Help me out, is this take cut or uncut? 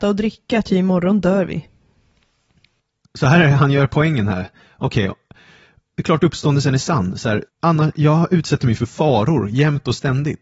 cut